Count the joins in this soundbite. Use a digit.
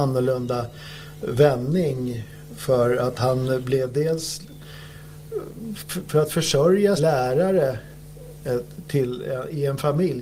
1